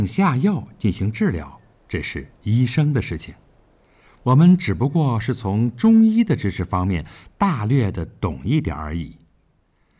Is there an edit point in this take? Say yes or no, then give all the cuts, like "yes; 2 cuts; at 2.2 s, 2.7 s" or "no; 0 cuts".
no; 0 cuts